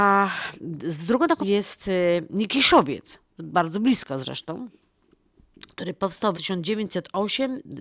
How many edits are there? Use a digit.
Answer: 2